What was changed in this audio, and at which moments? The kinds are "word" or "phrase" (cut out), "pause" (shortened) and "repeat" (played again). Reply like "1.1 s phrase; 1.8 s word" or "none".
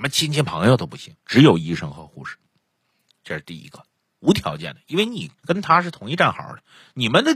1.2 s pause; 5.4 s pause